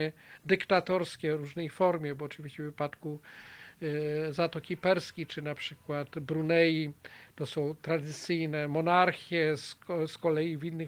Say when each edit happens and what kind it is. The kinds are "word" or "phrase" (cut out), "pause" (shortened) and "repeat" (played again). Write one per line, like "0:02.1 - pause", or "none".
none